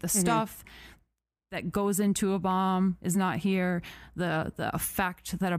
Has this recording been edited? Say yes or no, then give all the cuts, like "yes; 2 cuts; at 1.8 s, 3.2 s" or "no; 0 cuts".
no; 0 cuts